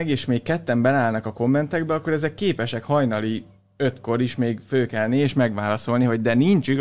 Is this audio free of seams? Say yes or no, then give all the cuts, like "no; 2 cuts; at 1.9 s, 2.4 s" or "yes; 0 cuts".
yes; 0 cuts